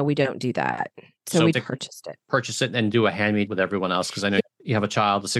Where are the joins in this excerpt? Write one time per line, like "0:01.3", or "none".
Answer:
0:01.5
0:02.2
0:03.5